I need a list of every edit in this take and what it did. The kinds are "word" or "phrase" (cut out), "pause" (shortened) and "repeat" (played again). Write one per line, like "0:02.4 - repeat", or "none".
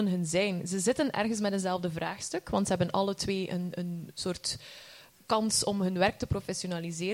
none